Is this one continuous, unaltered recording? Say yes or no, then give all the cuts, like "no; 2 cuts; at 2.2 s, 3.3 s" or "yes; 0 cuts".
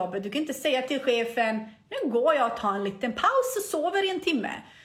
yes; 0 cuts